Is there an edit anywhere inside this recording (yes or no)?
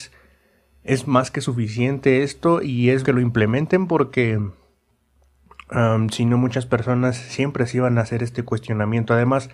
yes